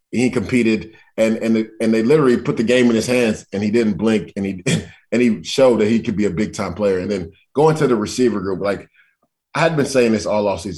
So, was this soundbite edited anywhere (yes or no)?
no